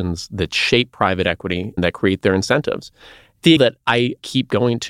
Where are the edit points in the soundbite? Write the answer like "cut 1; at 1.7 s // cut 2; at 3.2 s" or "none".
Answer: cut 1; at 1.8 s // cut 2; at 3.6 s